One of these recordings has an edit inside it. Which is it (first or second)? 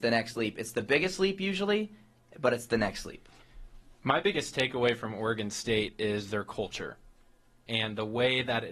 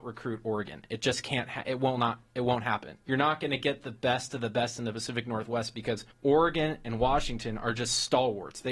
second